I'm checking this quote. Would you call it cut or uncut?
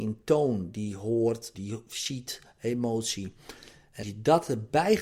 cut